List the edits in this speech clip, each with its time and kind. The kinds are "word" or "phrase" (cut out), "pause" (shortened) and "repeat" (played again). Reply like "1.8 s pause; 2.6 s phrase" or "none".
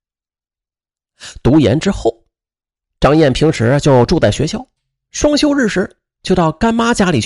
none